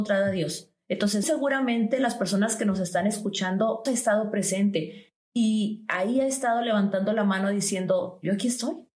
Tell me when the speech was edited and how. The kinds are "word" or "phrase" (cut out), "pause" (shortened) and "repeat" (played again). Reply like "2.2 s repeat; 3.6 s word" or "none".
1.2 s word; 3.9 s word; 5.2 s pause